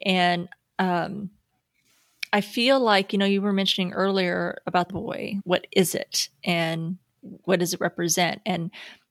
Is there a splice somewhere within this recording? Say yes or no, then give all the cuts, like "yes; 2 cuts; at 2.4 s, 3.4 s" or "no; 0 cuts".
yes; 3 cuts; at 4.9 s, 5.4 s, 7.4 s